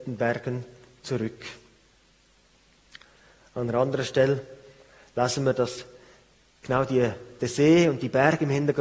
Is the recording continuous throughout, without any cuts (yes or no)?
yes